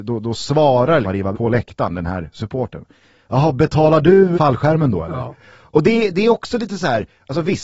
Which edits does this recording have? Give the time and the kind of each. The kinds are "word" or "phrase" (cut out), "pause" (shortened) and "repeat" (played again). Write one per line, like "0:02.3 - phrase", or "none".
0:01.0 - word
0:01.3 - word
0:04.3 - word
0:05.4 - pause
0:06.1 - word